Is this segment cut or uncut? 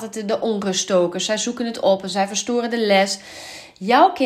uncut